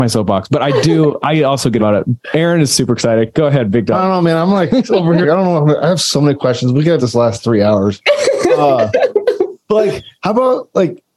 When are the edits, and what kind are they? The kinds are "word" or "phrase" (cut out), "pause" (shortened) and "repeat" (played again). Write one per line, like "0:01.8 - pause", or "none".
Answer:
0:01.8 - word
0:05.2 - word
0:07.0 - word
0:10.2 - pause